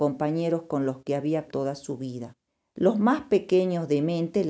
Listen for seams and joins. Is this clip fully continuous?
no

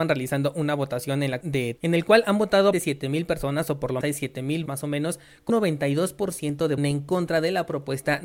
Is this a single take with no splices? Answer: no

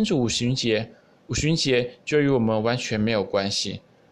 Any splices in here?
no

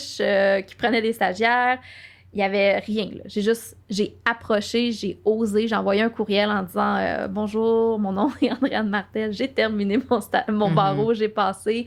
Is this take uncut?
yes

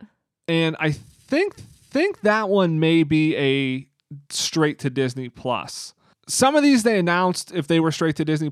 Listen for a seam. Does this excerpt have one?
yes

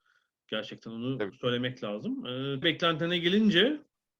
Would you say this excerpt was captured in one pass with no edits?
no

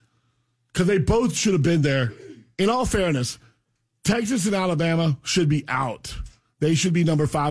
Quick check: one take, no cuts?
yes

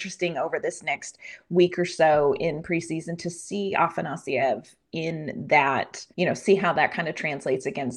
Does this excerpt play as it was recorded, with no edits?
no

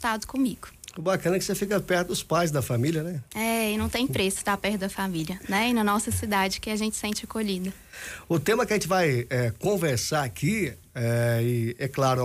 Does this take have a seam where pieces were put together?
no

